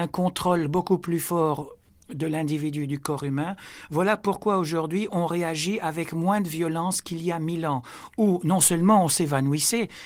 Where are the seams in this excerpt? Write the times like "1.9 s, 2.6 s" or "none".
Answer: none